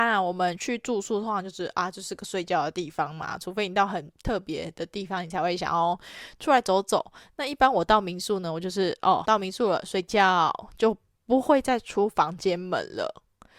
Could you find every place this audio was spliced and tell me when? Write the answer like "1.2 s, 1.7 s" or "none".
9.2 s